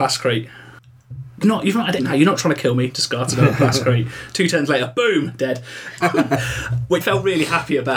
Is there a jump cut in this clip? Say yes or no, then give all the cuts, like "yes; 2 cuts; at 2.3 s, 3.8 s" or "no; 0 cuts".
yes; 4 cuts; at 1.4 s, 2.0 s, 6.0 s, 7.0 s